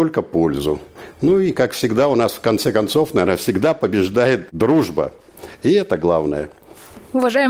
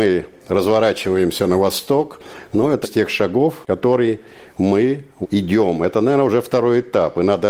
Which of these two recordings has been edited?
second; 2 cuts; at 2.8 s, 5.2 s

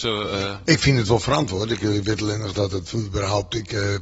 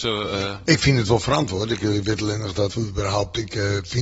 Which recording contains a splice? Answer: second; 1 cut; at 2.7 s

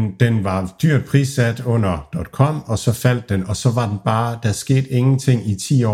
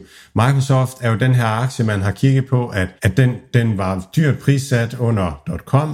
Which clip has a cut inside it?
second; 2 cuts; at 3.0 s, 3.5 s

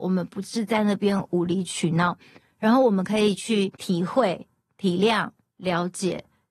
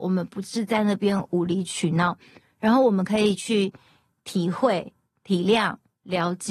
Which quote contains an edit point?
first; 1 cut; at 3.8 s

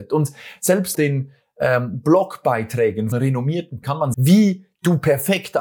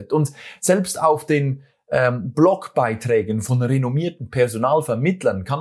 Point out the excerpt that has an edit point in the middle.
first; 4 cuts; at 0.9 s, 3.1 s, 3.8 s, 4.1 s

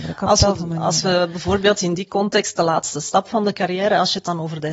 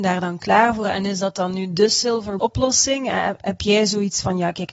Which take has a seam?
second; 2 cuts; at 2.4 s, 3.4 s

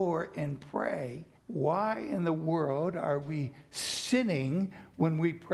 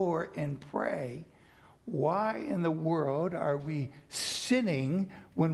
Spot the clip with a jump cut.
first; 1 cut; at 1.4 s

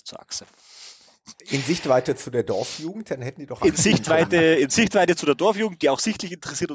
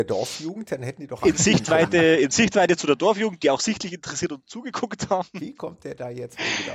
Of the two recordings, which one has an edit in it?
first; 1 cut; at 1.4 s

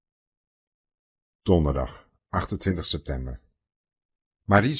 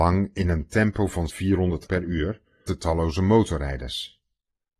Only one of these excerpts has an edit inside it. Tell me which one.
second; 3 cuts; at 1.3 s, 1.9 s, 2.7 s

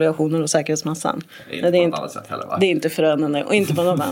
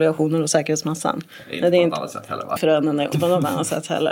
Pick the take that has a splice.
second; 2 cuts; at 2.6 s, 3.1 s

